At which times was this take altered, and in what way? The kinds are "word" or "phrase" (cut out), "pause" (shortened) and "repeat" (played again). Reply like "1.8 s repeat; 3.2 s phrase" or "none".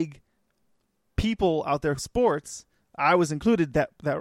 2.0 s word